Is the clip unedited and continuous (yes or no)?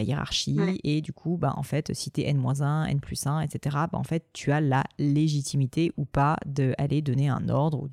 yes